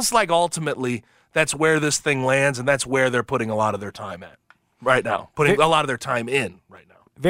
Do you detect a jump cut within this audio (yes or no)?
no